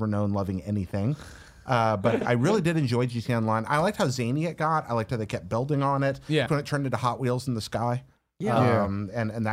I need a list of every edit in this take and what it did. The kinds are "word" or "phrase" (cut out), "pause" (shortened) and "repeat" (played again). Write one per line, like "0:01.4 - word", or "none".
0:02.2 - word
0:06.5 - word